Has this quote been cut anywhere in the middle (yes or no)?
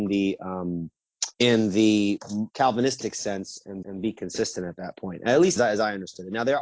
yes